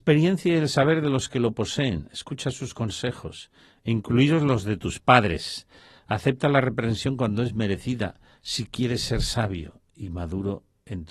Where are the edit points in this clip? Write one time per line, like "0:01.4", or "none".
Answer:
none